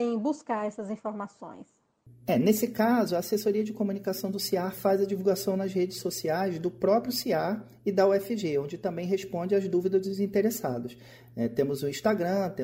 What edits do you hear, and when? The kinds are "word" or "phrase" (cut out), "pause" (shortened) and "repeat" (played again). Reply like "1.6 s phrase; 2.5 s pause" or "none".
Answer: none